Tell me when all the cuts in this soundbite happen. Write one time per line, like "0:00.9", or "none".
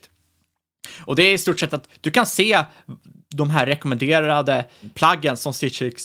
none

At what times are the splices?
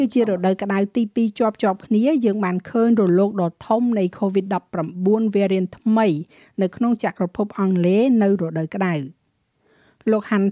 none

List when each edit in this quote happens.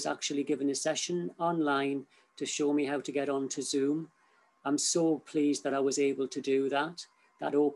none

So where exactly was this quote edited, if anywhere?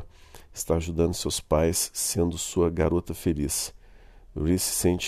none

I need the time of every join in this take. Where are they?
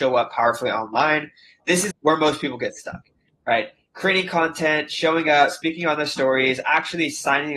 0:01.9

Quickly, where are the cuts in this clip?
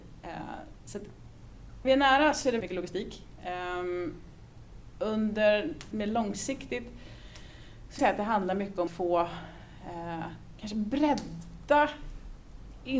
0:01.8
0:02.6
0:05.9
0:08.0
0:08.9

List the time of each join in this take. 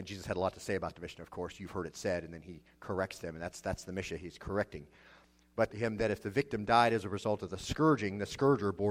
0:05.7

